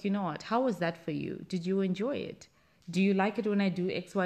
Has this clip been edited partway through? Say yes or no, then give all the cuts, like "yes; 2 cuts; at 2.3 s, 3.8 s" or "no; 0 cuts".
no; 0 cuts